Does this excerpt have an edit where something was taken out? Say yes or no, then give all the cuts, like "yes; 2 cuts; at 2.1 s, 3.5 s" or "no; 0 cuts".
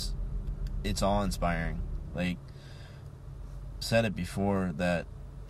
yes; 1 cut; at 3.8 s